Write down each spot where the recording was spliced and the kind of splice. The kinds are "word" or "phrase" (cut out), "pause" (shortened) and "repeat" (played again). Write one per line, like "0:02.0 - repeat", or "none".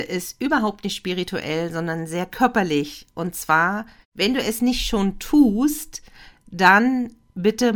none